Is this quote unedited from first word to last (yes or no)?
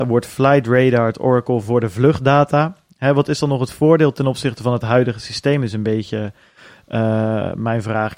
yes